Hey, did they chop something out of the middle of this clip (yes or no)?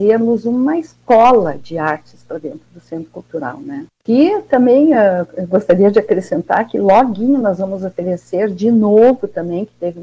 no